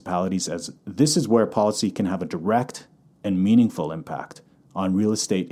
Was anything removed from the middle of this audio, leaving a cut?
no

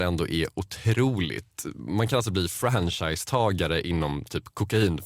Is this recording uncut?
yes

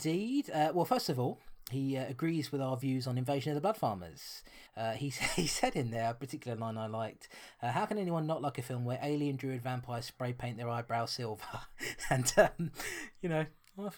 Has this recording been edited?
yes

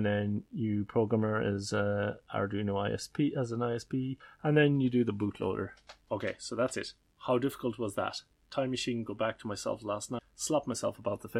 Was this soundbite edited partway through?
no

